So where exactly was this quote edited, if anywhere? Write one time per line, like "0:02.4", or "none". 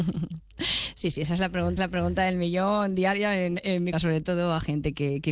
0:01.8
0:03.9